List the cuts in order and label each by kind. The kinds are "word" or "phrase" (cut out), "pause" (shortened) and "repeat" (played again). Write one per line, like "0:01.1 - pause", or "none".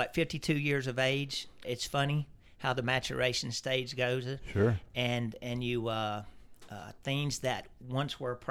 0:01.6 - word